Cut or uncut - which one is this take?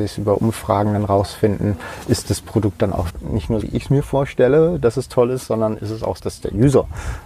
cut